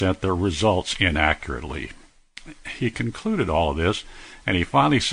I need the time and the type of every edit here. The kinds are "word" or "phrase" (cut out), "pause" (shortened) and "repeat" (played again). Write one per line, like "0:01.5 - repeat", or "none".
none